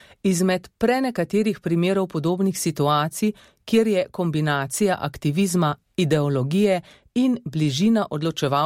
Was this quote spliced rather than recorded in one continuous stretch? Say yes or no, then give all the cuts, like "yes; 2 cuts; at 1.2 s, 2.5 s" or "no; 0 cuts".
no; 0 cuts